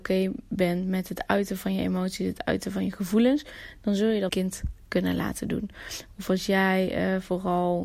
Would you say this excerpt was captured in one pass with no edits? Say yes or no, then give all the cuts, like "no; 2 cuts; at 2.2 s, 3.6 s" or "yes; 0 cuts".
no; 1 cut; at 4.3 s